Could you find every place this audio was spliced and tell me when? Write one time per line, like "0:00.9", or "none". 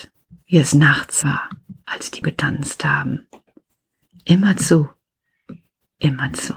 0:01.2
0:02.2